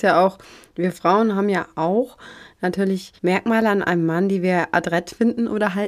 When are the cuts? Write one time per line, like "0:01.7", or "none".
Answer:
0:03.2